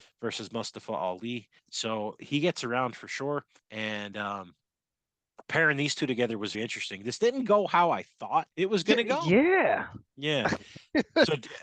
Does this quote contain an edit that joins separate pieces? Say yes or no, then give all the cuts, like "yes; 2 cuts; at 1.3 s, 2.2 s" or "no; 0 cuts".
yes; 5 cuts; at 1.6 s, 3.6 s, 6.5 s, 8.5 s, 10.1 s